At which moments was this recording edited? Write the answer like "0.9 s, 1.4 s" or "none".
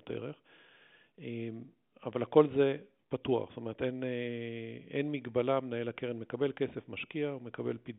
none